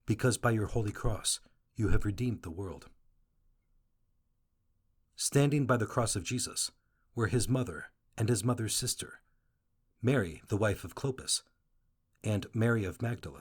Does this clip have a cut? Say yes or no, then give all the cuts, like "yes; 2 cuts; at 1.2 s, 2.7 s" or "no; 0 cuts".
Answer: no; 0 cuts